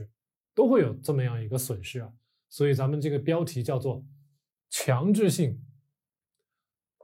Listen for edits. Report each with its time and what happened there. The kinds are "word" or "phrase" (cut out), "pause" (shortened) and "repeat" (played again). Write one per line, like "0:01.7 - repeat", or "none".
none